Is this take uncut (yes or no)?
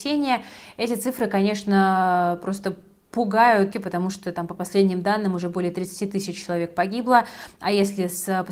no